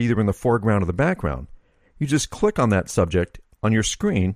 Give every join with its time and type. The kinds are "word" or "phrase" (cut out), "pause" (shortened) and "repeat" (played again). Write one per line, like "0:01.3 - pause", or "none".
none